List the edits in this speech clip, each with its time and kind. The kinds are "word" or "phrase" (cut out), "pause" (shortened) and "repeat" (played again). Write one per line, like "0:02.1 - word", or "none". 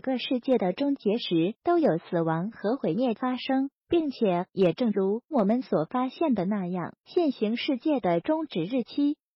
0:01.6 - pause
0:03.8 - pause
0:07.0 - pause